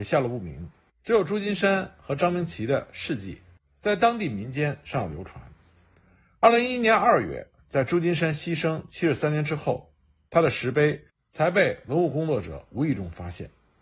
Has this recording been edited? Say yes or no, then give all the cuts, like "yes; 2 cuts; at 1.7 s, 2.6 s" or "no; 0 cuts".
no; 0 cuts